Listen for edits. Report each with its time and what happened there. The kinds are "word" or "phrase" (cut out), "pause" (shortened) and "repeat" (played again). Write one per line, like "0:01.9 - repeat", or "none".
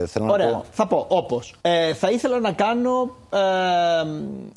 0:01.6 - pause